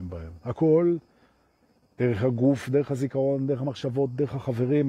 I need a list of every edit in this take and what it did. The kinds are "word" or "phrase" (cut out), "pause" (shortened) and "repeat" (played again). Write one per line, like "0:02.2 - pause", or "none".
none